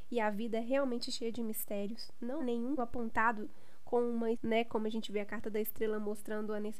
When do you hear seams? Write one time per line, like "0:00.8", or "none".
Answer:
0:02.4
0:02.8
0:04.3